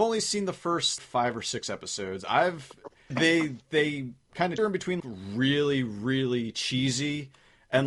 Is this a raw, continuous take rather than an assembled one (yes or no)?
no